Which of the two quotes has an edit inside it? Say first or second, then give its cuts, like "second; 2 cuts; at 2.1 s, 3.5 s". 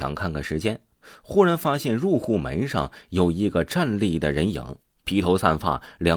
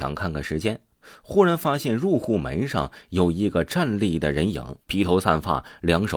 second; 1 cut; at 4.8 s